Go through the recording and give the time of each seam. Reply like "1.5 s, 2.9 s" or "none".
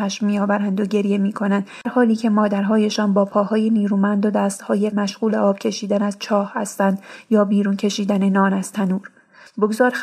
1.8 s, 4.9 s